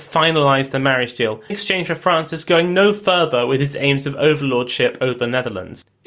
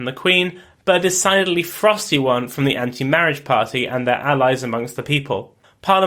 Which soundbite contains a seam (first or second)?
first